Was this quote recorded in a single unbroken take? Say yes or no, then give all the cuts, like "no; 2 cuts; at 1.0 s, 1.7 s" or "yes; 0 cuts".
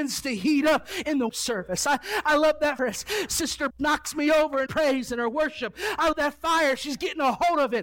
no; 5 cuts; at 1.3 s, 2.8 s, 3.7 s, 4.7 s, 6.1 s